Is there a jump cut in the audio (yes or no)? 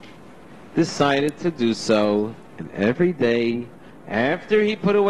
no